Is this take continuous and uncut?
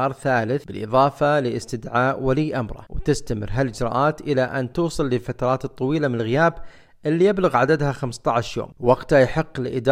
yes; 0 cuts

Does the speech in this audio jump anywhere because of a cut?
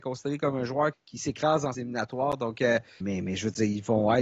yes; 3 cuts; at 0.9 s, 1.7 s, 3.0 s

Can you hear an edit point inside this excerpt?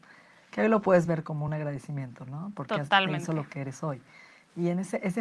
no; 0 cuts

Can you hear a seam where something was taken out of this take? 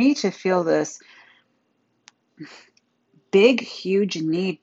no; 0 cuts

